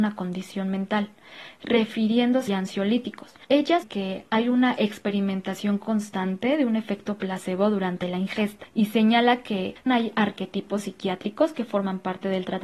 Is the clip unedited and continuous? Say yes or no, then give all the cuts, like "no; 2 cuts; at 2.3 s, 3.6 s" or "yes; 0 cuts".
no; 3 cuts; at 2.5 s, 3.8 s, 9.9 s